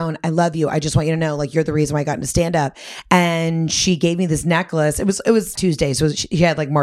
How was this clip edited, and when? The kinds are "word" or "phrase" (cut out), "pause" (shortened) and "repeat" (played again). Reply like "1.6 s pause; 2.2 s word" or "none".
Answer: 5.6 s word